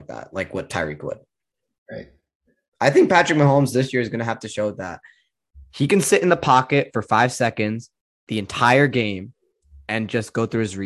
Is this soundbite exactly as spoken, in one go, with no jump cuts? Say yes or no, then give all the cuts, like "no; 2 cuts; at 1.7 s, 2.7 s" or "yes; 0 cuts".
yes; 0 cuts